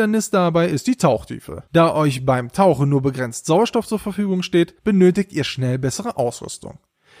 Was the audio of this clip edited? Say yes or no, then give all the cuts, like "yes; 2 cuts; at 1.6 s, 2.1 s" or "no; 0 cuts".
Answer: yes; 2 cuts; at 1.7 s, 4.8 s